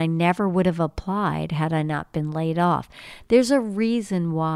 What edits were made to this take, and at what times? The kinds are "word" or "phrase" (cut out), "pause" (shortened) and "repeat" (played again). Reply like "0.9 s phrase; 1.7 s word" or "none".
none